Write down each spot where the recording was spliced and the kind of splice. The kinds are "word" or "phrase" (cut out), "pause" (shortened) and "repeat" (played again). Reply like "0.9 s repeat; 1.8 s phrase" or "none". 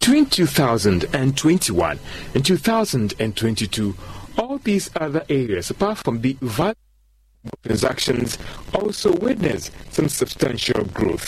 7.6 s pause